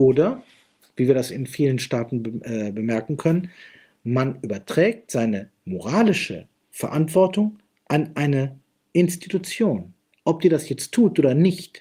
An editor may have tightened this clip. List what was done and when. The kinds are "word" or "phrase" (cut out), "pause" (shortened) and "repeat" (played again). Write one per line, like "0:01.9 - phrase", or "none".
none

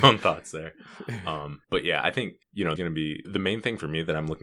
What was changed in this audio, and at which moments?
0:01.6 - pause
0:02.4 - pause
0:02.8 - word
0:03.2 - word

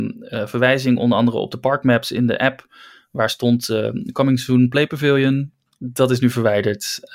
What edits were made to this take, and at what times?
none

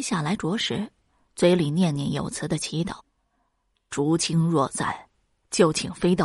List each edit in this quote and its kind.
0:03.0 - pause

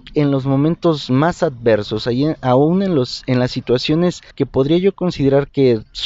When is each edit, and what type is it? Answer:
0:04.3 - pause

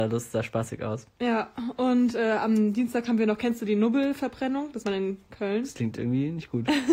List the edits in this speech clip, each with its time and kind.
0:04.8 - word

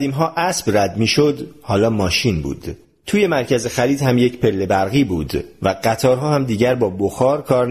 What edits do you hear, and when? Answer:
none

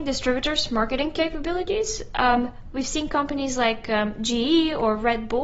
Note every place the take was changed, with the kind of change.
none

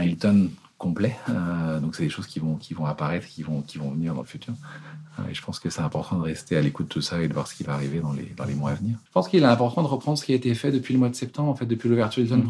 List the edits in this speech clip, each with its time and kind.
0:09.1 - pause

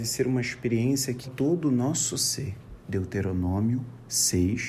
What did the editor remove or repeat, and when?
0:01.2 - word

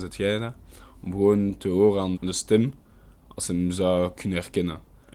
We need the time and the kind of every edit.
0:02.1 - word

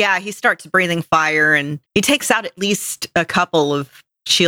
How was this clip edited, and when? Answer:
0:01.9 - pause

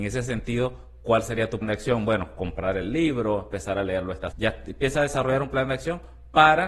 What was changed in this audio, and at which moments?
0:01.6 - word
0:04.3 - word

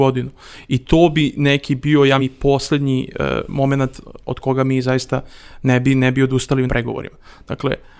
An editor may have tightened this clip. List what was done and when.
0:02.2 - word
0:06.7 - word

